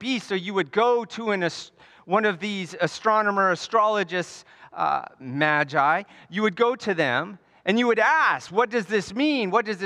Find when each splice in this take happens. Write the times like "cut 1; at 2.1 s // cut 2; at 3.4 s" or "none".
none